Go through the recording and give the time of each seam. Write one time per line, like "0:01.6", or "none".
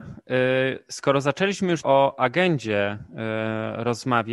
0:01.8